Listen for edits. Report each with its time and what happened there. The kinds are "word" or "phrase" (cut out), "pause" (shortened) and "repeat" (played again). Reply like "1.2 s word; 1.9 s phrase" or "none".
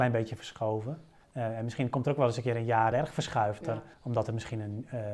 1.2 s pause; 2.9 s phrase; 3.6 s word; 3.9 s pause